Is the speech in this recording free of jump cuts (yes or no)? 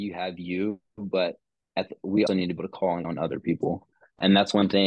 no